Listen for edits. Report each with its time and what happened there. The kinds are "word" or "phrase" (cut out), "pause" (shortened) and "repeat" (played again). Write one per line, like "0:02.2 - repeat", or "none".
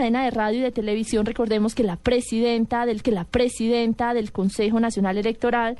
0:03.0 - repeat